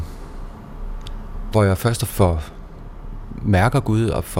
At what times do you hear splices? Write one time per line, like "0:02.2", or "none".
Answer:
0:01.5
0:02.1